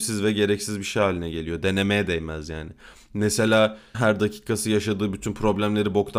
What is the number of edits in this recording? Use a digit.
1